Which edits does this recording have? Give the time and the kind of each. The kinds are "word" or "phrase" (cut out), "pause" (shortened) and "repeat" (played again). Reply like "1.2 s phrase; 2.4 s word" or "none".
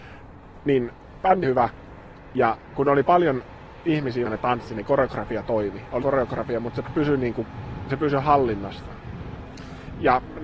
1.4 s word; 4.2 s word; 6.0 s word